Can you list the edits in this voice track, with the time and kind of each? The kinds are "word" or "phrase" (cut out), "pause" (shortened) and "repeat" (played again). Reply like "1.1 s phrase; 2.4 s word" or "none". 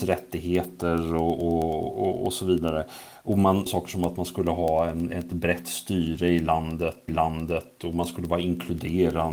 3.7 s phrase; 7.1 s repeat